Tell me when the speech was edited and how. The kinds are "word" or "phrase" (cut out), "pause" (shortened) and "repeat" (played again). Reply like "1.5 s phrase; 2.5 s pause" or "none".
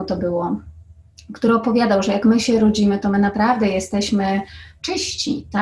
none